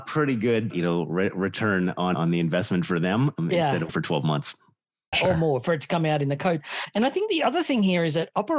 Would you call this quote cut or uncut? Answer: cut